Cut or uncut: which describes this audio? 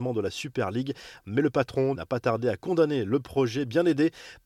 cut